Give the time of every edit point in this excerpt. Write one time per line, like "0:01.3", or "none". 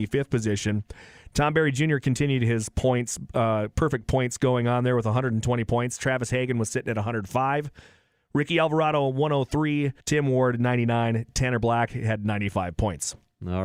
0:10.0